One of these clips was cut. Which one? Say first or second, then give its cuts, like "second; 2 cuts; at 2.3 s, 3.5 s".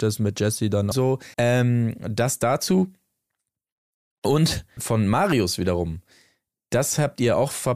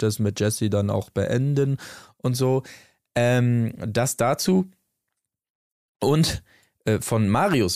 first; 3 cuts; at 0.9 s, 1.3 s, 4.8 s